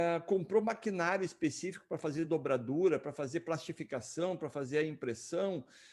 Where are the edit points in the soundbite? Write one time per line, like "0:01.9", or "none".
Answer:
none